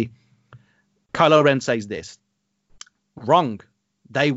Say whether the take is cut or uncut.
uncut